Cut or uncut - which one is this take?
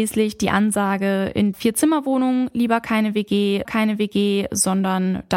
cut